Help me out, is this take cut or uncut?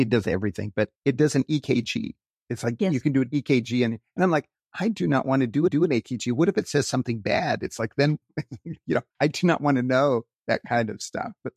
cut